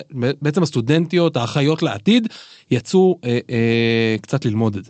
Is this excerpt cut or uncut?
uncut